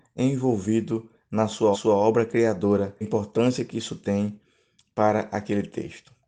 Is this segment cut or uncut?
cut